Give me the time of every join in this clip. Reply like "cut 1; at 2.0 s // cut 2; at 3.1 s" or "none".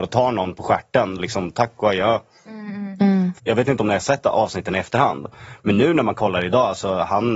cut 1; at 3.4 s